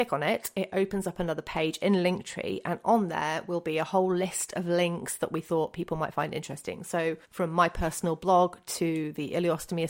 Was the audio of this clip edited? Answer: yes; 1 cut; at 7.2 s

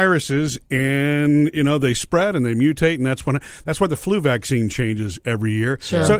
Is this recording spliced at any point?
no; 0 cuts

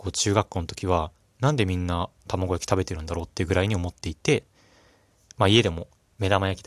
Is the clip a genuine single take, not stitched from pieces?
no; 1 cut; at 2.2 s

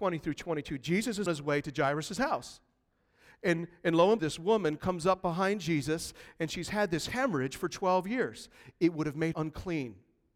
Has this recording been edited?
yes; 3 cuts; at 1.3 s, 4.2 s, 9.3 s

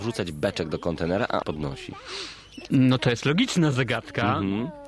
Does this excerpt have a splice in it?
yes; 1 cut; at 1.4 s

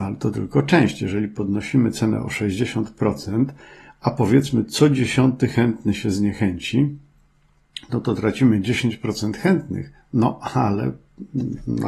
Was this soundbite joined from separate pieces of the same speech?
no; 0 cuts

